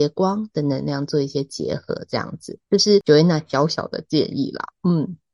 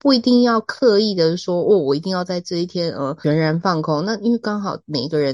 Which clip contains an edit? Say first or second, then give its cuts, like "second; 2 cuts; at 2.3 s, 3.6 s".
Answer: first; 1 cut; at 2.6 s